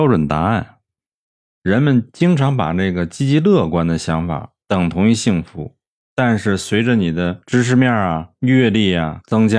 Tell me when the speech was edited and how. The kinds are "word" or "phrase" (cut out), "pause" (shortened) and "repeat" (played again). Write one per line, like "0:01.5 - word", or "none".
none